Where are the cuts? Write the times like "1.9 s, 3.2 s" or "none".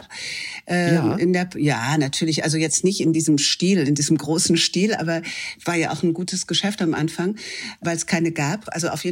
none